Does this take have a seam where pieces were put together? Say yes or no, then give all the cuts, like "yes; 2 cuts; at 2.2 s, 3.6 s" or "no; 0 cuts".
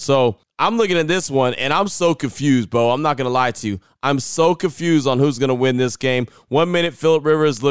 no; 0 cuts